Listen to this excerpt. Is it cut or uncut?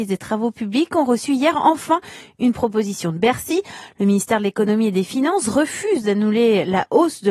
uncut